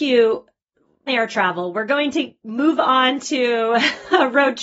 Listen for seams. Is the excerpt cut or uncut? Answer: cut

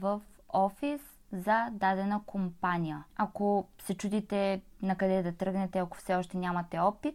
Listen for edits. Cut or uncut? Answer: uncut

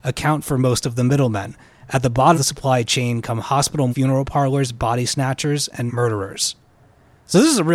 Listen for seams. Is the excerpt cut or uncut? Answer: cut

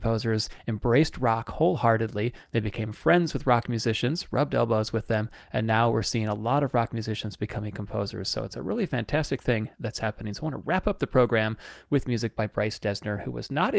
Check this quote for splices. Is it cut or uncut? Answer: uncut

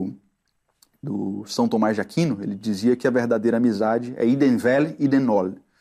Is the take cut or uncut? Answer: uncut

